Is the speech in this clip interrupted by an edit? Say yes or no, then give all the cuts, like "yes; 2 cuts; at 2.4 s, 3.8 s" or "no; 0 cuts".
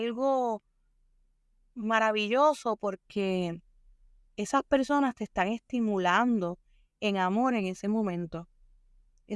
no; 0 cuts